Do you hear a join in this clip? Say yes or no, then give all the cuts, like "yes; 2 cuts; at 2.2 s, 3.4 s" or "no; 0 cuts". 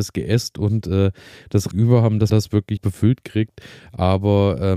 yes; 3 cuts; at 1.7 s, 2.3 s, 2.8 s